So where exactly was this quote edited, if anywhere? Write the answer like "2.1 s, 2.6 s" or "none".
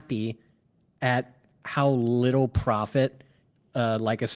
none

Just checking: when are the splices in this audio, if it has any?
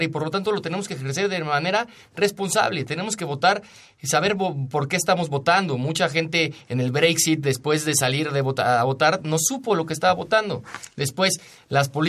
none

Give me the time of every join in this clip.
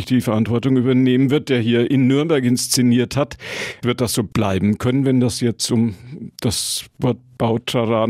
4.3 s

